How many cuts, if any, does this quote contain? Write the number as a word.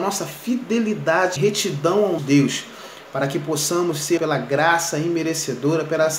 three